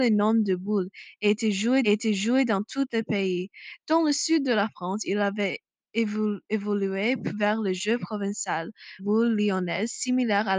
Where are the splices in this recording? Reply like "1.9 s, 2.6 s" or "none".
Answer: 1.8 s, 6.4 s, 9.0 s